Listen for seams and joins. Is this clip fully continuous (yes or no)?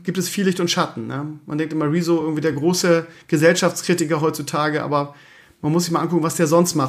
yes